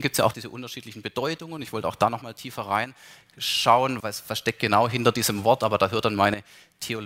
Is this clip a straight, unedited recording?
no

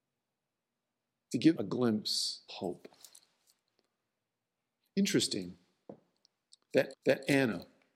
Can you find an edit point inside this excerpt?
yes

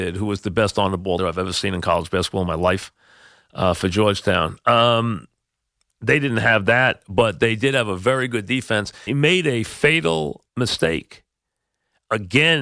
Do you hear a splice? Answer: yes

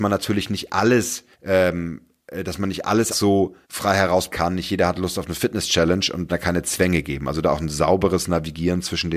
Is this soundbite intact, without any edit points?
no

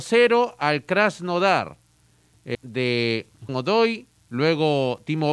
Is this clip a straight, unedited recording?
no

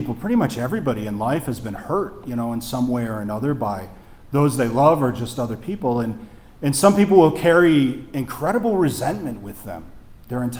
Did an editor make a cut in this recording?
no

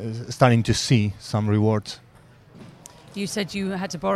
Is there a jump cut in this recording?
no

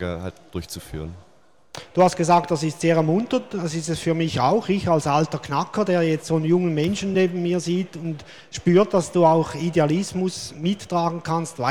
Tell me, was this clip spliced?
no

